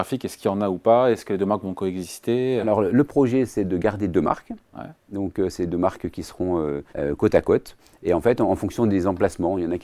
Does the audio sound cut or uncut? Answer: cut